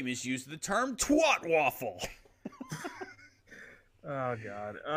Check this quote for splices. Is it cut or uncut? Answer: uncut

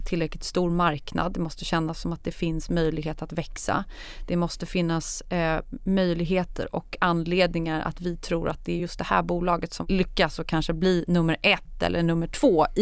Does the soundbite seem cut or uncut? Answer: uncut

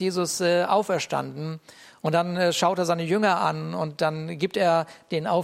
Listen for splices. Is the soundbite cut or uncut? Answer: uncut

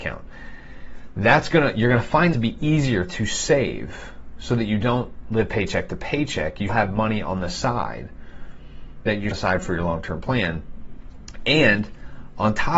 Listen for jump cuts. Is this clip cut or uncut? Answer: cut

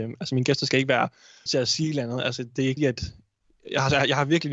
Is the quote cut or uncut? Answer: cut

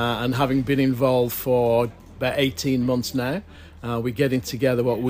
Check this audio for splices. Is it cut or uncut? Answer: uncut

